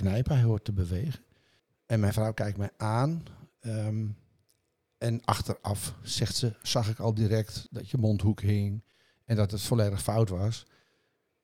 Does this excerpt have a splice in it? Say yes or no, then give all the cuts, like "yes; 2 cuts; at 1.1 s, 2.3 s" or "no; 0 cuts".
yes; 1 cut; at 1.6 s